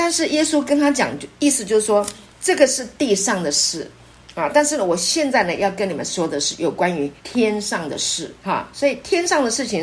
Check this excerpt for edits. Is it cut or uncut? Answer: cut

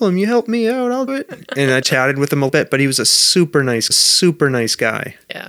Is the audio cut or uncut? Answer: cut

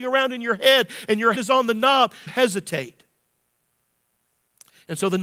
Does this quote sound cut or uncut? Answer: cut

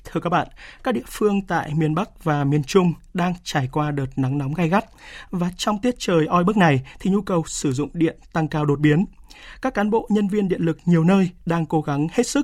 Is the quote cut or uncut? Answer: uncut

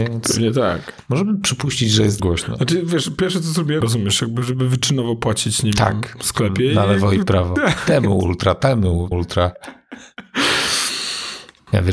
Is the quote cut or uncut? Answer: cut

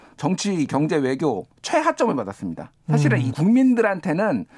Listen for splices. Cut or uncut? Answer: cut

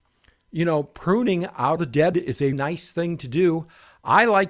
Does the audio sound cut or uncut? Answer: cut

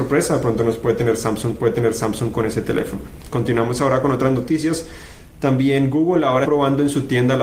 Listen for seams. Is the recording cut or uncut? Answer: cut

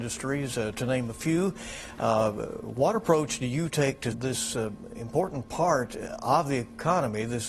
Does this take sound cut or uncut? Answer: cut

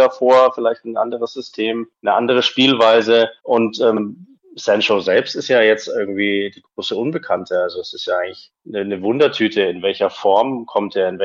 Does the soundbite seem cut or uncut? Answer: cut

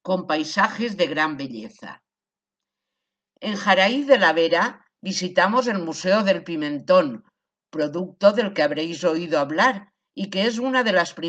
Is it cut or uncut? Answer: uncut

